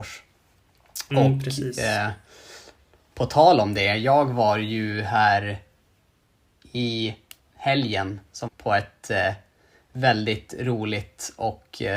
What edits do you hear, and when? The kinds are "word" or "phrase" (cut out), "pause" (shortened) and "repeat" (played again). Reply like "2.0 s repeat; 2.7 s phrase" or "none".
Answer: 8.5 s word